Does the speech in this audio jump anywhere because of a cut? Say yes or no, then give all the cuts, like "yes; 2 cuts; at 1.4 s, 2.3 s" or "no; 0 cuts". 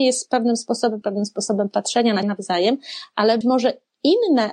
yes; 3 cuts; at 1.0 s, 2.2 s, 3.4 s